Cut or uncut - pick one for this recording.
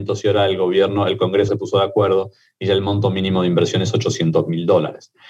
cut